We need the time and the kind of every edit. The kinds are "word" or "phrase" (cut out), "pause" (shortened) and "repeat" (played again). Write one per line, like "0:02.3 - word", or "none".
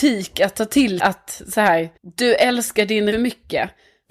0:01.0 - word
0:02.0 - pause
0:03.1 - phrase